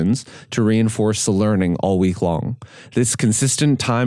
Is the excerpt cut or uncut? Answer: uncut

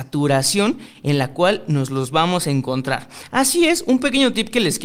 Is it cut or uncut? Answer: uncut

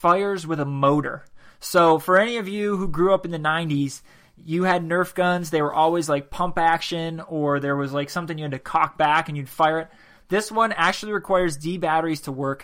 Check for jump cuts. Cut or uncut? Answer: uncut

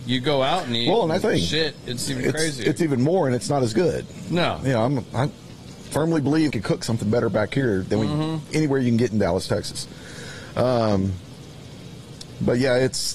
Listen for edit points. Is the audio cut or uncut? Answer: cut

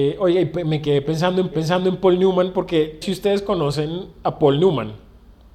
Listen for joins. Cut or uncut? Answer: cut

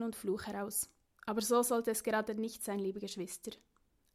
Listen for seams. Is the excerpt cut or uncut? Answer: uncut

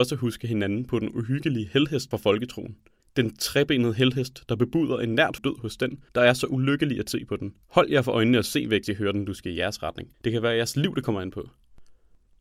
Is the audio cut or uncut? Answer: cut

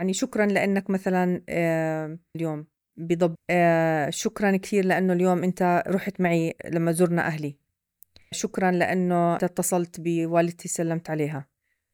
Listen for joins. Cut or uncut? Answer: cut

